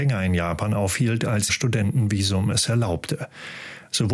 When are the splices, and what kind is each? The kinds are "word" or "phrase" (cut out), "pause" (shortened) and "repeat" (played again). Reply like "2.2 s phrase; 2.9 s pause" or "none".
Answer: 1.5 s word